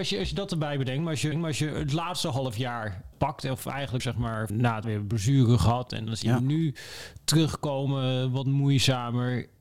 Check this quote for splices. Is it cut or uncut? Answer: cut